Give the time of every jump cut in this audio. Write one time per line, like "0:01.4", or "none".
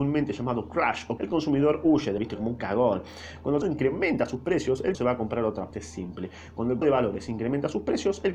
0:01.2
0:02.2
0:03.6
0:04.9
0:05.7
0:06.8